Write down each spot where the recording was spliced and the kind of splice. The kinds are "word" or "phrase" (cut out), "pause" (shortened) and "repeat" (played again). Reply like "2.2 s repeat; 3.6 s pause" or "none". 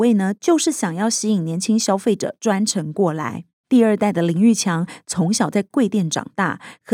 3.6 s pause